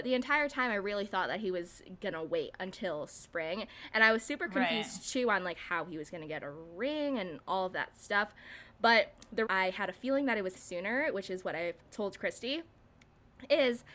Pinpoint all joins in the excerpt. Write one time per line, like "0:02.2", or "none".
0:09.5
0:10.5
0:11.8